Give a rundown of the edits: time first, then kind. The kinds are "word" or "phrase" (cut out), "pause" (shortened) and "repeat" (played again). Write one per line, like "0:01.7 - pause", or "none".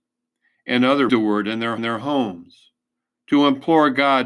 0:01.1 - phrase
0:01.8 - repeat